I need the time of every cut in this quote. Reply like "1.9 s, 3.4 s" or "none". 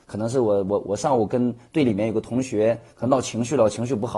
none